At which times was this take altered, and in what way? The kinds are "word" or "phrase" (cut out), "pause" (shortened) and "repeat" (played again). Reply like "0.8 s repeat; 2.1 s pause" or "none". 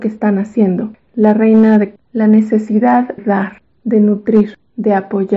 2.0 s word; 3.2 s word